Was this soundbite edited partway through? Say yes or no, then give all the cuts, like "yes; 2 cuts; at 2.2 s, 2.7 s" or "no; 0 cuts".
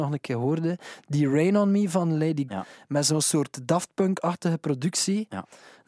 yes; 1 cut; at 2.5 s